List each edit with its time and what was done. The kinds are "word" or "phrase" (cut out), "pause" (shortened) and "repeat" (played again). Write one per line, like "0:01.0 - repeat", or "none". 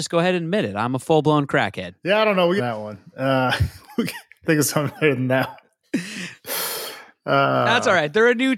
0:02.6 - phrase
0:04.4 - word